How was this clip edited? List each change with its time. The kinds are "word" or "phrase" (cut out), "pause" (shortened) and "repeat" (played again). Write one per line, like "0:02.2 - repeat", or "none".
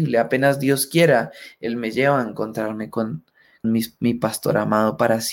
0:03.6 - word